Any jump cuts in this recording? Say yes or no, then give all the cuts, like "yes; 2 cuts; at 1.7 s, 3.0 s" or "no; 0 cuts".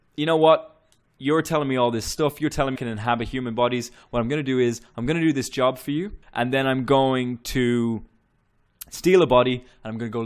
yes; 2 cuts; at 2.8 s, 6.2 s